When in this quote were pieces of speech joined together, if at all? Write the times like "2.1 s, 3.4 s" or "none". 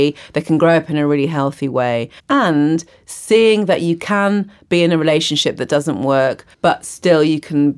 2.2 s, 6.5 s